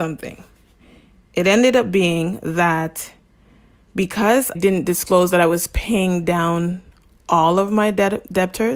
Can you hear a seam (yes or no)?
yes